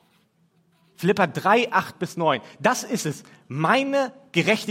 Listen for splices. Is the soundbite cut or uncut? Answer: uncut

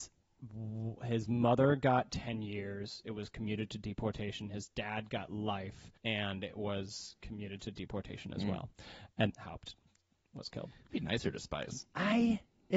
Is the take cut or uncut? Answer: cut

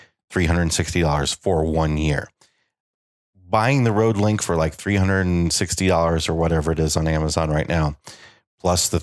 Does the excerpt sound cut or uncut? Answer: uncut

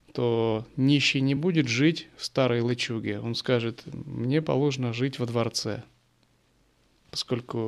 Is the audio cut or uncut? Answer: uncut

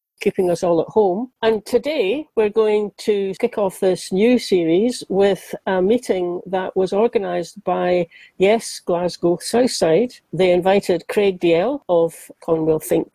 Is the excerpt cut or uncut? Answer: uncut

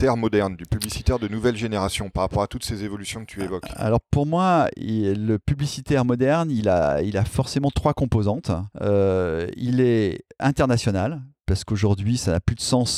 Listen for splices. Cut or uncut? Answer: cut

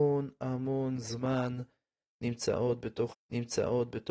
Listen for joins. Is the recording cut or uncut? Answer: cut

